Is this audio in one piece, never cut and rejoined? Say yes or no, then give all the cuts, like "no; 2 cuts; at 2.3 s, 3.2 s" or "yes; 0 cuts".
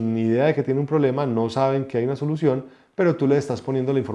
yes; 0 cuts